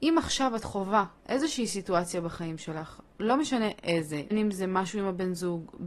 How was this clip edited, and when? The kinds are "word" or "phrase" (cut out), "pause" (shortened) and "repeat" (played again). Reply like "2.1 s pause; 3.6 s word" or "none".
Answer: 4.3 s word